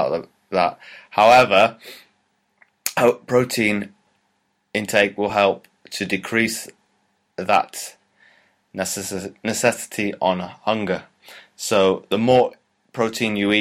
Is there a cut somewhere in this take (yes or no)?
no